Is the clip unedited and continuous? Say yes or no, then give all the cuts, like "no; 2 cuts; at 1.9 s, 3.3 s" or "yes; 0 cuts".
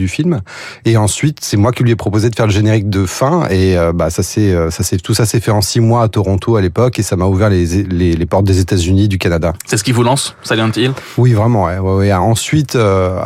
yes; 0 cuts